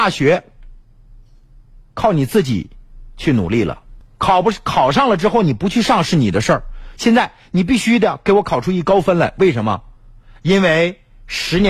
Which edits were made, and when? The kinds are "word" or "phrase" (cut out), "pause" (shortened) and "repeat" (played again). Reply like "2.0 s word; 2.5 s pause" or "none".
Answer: none